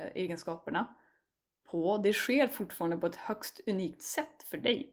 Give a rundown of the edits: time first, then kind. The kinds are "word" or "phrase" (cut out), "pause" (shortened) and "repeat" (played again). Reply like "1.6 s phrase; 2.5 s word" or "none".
none

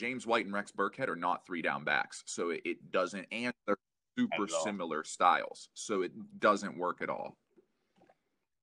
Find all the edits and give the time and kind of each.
none

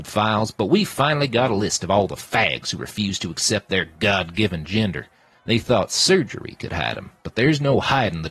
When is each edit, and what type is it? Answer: none

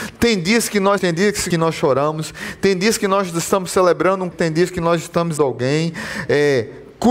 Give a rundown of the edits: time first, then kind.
1.0 s word; 1.5 s word; 4.3 s word; 5.4 s word

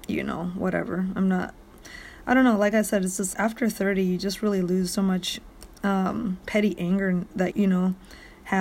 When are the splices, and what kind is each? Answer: 3.3 s word; 7.5 s word

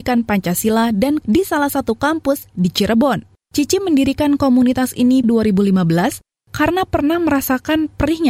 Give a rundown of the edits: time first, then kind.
1.2 s word; 5.2 s word

